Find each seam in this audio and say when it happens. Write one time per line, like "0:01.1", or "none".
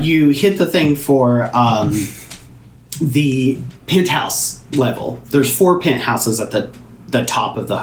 none